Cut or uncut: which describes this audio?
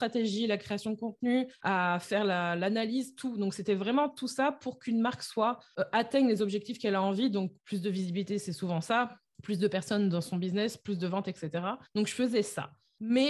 cut